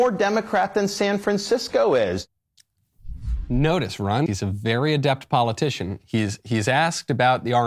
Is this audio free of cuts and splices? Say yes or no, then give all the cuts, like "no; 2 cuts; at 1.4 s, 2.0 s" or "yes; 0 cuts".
no; 1 cut; at 4.3 s